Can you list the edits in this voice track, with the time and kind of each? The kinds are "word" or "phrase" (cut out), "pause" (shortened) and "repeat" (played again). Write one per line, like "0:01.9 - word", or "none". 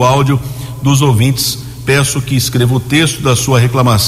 none